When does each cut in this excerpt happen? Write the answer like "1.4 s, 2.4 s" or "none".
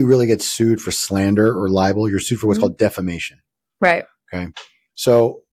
none

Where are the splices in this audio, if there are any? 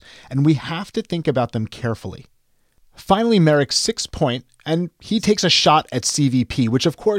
none

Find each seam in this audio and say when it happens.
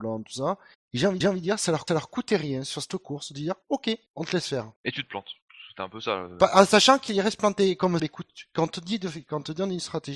1.2 s, 1.9 s, 4.1 s, 4.8 s, 8.0 s

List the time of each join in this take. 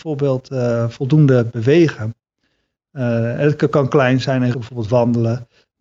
4.5 s

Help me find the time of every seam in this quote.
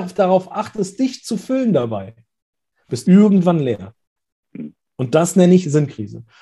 3.0 s

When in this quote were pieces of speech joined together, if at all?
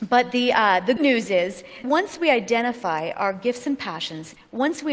1.0 s, 1.8 s

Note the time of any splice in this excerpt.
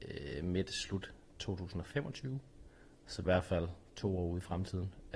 3.2 s

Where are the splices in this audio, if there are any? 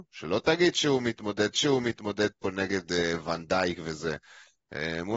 1.5 s

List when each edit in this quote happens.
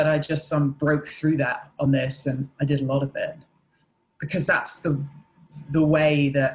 none

